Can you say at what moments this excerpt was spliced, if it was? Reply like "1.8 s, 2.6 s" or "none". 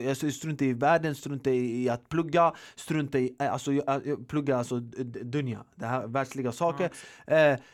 none